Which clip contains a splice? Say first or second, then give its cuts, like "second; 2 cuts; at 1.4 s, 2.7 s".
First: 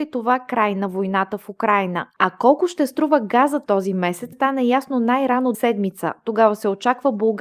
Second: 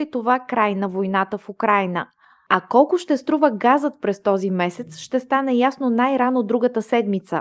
first; 4 cuts; at 2.1 s, 3.7 s, 4.3 s, 5.5 s